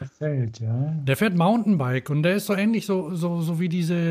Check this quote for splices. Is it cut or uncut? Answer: uncut